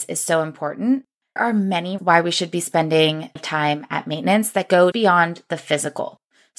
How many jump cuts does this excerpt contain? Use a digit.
4